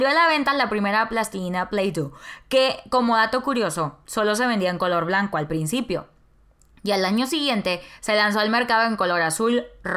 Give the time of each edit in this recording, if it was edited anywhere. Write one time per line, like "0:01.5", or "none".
none